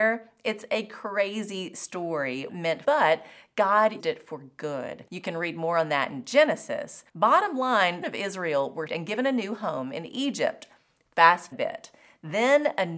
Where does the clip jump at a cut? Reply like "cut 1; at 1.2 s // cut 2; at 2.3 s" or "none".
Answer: cut 1; at 2.5 s // cut 2; at 2.8 s // cut 3; at 4.0 s // cut 4; at 5.1 s // cut 5; at 7.1 s // cut 6; at 8.0 s // cut 7; at 8.9 s // cut 8; at 11.5 s